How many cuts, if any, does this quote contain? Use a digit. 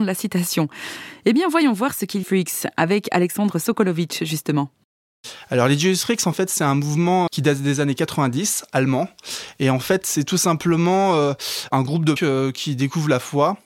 3